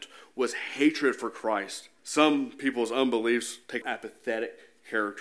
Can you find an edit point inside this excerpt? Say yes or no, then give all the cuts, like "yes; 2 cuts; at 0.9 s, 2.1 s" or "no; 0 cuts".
yes; 2 cuts; at 2.0 s, 3.8 s